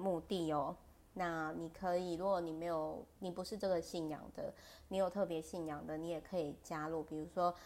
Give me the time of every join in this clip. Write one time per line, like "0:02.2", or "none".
0:03.2